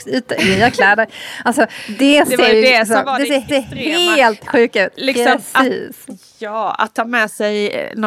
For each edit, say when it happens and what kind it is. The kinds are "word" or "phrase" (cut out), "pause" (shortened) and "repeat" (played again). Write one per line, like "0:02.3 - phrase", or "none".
0:03.5 - repeat